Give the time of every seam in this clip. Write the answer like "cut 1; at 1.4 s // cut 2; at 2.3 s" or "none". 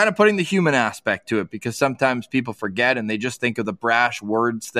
none